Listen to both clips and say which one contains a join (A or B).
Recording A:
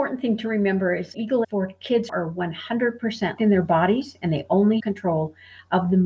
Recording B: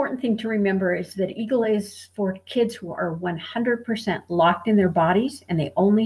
A